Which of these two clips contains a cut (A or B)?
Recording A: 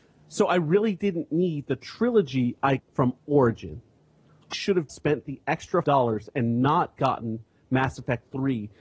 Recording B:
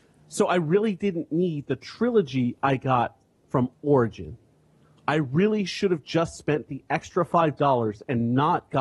A